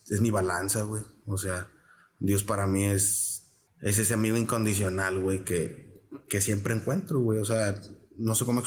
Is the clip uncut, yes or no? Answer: no